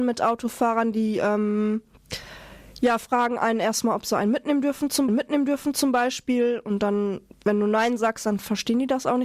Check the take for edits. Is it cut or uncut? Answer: cut